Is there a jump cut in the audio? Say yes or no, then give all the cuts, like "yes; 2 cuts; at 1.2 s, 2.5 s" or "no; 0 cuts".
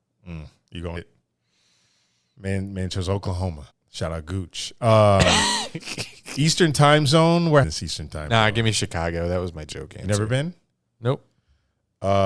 yes; 3 cuts; at 1.0 s, 3.7 s, 7.6 s